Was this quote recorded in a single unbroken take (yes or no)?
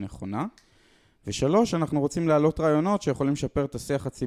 yes